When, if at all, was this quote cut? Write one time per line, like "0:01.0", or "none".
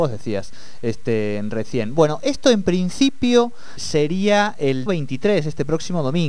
0:03.8
0:04.9